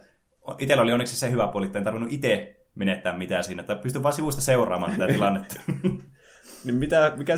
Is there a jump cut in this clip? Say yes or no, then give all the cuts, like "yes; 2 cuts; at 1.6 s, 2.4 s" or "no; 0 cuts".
no; 0 cuts